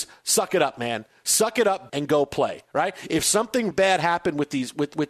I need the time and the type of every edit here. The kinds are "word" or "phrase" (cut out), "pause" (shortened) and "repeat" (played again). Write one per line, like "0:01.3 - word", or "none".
0:01.9 - phrase
0:03.7 - word

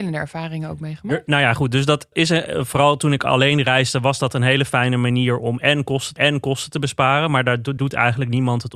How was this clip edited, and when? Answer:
0:02.1 - word
0:06.2 - repeat
0:07.8 - word

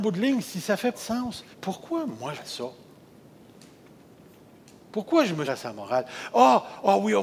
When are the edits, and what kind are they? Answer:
0:00.9 - word
0:01.5 - pause
0:02.4 - phrase
0:05.5 - word

